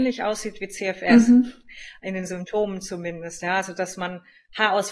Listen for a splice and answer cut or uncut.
uncut